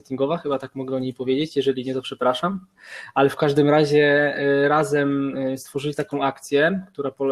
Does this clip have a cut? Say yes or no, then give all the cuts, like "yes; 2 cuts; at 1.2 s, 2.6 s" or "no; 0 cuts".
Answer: no; 0 cuts